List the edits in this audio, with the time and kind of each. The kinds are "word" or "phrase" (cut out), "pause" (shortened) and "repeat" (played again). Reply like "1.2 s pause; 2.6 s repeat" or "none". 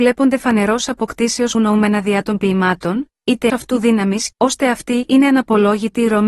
1.5 s word; 3.5 s word; 4.3 s phrase

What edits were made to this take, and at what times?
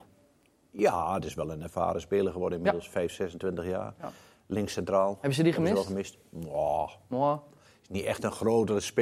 none

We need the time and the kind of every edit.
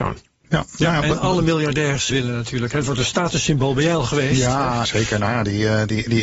2.1 s word; 4.8 s word

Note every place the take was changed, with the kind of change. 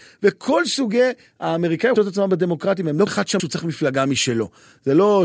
2.0 s phrase; 3.1 s word; 3.4 s word

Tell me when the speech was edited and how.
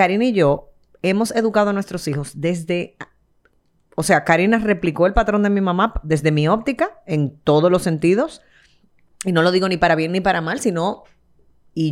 none

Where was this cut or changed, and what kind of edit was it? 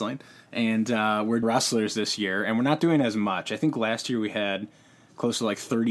1.4 s word

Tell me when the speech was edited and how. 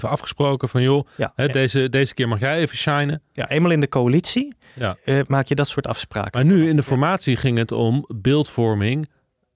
none

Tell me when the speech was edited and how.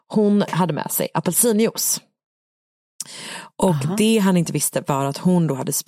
none

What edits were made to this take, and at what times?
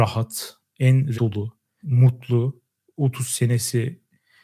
1.1 s word; 1.8 s word

